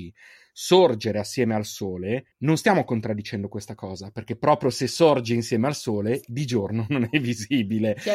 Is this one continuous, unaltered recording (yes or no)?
no